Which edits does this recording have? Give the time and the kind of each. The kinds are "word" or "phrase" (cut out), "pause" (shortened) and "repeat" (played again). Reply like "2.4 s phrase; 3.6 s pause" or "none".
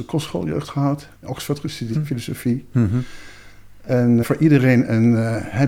1.1 s pause; 1.9 s word; 4.2 s word